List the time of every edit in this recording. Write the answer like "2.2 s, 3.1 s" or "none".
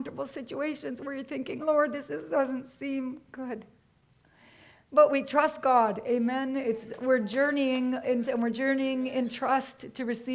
1.6 s, 8.2 s